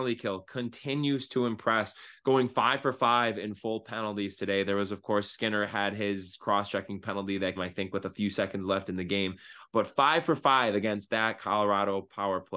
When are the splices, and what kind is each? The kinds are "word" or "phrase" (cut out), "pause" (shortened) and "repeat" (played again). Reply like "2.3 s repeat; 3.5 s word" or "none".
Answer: 7.6 s word